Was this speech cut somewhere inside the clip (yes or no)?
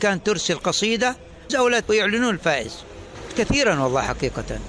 yes